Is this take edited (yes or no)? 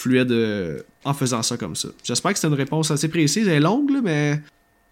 no